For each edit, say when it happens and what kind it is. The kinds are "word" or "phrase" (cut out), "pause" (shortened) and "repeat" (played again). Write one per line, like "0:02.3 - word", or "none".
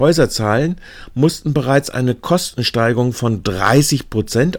none